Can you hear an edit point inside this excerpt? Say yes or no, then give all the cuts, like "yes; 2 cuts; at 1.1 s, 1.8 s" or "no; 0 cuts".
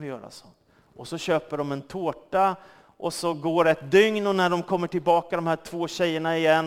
no; 0 cuts